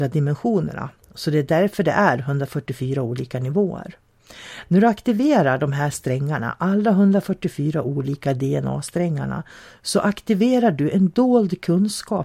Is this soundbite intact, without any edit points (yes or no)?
yes